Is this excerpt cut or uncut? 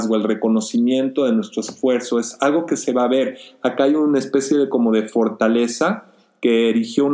uncut